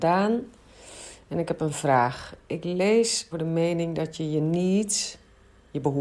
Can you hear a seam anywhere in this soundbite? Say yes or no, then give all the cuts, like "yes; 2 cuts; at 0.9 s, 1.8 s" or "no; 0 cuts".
yes; 1 cut; at 3.3 s